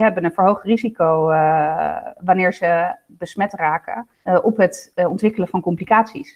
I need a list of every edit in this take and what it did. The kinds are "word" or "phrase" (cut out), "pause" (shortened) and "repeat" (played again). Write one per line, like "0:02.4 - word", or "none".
0:04.1 - pause